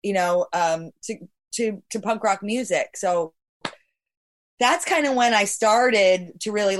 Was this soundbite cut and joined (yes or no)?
no